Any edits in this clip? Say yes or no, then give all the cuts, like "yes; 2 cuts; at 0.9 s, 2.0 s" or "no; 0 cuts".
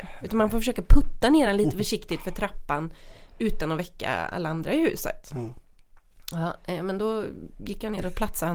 no; 0 cuts